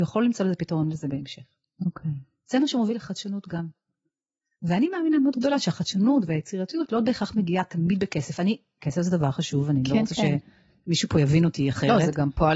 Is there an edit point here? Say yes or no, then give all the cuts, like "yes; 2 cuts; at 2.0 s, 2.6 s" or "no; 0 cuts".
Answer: no; 0 cuts